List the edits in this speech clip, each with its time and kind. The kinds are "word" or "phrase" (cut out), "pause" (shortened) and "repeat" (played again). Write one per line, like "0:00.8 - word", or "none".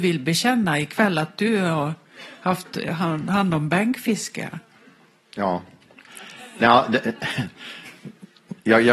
none